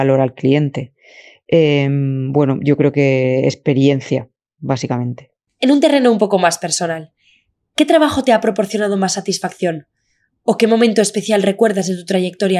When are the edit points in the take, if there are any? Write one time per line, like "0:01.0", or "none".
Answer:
none